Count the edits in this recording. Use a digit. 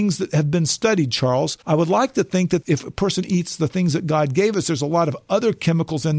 1